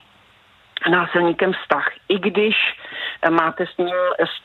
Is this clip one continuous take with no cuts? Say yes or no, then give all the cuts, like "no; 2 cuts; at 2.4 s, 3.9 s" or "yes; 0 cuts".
yes; 0 cuts